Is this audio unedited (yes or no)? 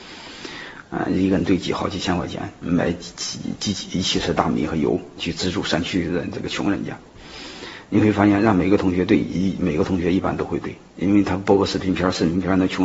no